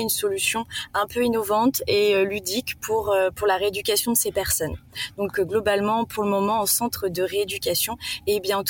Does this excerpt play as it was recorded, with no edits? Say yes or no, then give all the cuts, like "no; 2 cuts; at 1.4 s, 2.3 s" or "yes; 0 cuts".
yes; 0 cuts